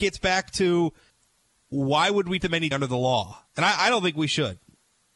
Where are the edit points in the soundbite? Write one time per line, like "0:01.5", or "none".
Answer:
0:01.1
0:02.4
0:02.7
0:03.5

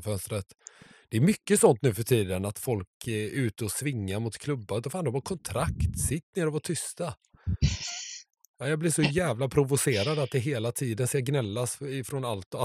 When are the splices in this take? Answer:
none

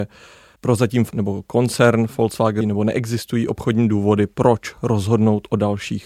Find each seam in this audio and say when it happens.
0:01.1
0:02.6

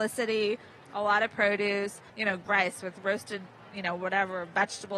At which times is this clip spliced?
0:02.1
0:02.5

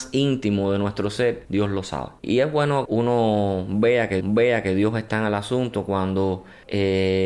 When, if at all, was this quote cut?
0:02.8
0:04.2

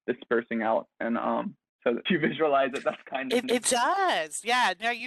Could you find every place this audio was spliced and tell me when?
0:02.1
0:03.4

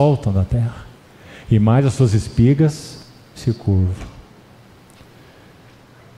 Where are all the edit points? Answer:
none

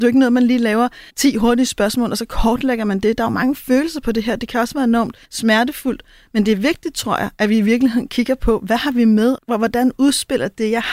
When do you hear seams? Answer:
0:01.1
0:05.2
0:09.4

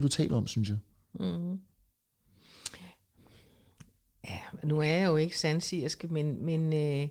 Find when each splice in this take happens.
none

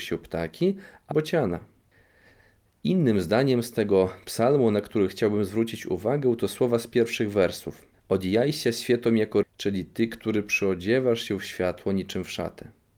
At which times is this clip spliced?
0:01.1
0:07.9
0:09.4

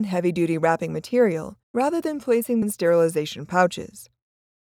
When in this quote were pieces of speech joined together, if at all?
0:01.6
0:02.6

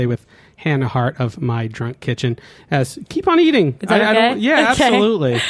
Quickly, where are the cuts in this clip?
none

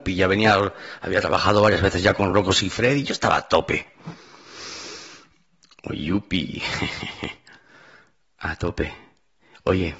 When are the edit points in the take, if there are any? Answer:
none

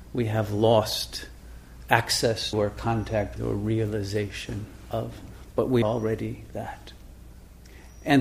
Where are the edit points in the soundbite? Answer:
0:02.5
0:03.4
0:05.8

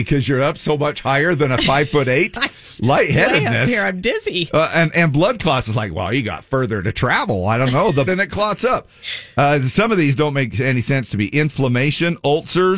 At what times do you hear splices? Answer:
0:08.1

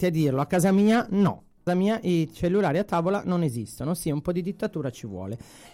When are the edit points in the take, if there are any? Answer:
0:01.7

